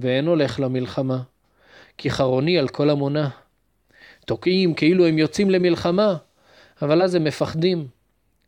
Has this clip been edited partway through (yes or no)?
no